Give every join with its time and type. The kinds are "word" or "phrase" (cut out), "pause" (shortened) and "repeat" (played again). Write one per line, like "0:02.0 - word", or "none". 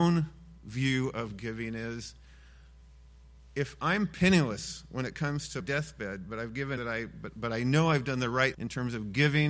0:05.6 - word
0:06.8 - word
0:08.5 - word